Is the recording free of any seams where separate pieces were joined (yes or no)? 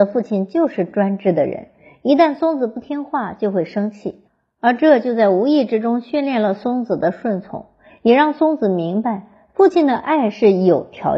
yes